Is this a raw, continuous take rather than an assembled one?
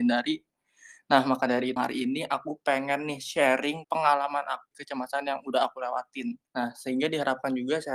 no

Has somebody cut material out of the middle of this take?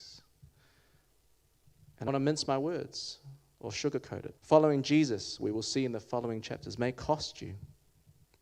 yes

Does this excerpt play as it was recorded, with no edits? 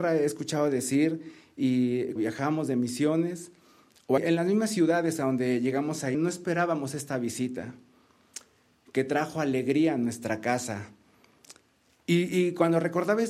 no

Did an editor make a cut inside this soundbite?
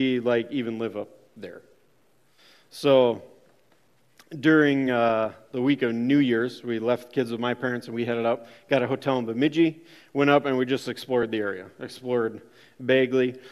no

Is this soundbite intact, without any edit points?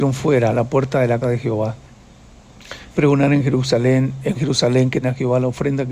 no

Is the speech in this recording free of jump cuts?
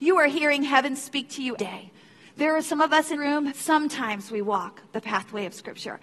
no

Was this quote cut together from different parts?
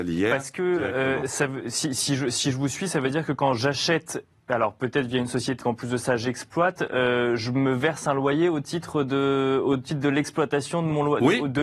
yes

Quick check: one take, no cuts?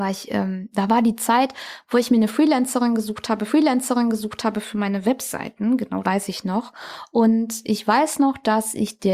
no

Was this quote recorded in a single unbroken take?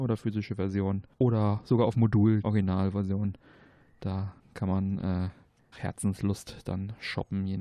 no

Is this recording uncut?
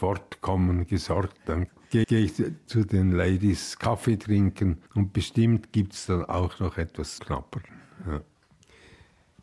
no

